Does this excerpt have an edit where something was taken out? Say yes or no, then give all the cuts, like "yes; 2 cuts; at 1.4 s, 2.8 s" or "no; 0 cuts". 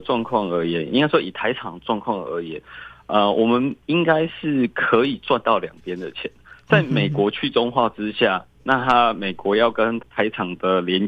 no; 0 cuts